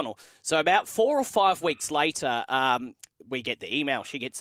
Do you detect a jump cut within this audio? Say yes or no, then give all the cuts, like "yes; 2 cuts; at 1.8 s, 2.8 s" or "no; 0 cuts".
no; 0 cuts